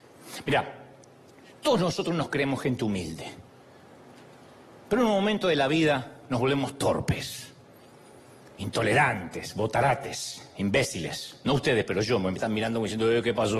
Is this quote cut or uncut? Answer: uncut